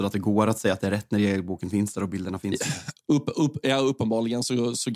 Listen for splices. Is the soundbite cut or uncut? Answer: uncut